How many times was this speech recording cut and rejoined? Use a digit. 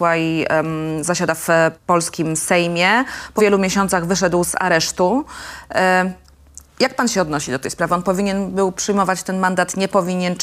2